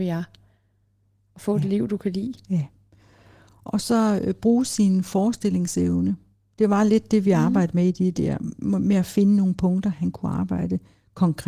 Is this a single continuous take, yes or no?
yes